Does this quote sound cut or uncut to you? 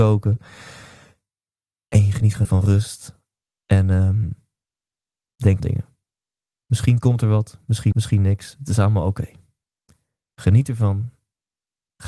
cut